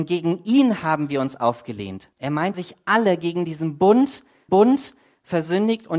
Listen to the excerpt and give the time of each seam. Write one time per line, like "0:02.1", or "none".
0:02.1
0:02.5
0:04.5